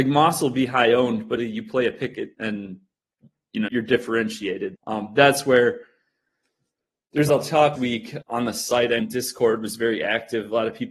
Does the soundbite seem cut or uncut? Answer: cut